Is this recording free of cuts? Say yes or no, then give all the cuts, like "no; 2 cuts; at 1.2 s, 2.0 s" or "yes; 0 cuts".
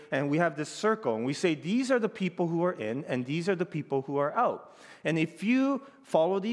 yes; 0 cuts